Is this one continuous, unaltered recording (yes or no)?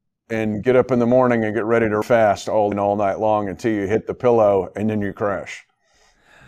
no